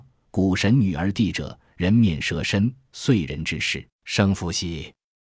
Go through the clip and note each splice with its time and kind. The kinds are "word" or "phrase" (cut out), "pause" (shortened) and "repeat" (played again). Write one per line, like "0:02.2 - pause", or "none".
0:03.9 - pause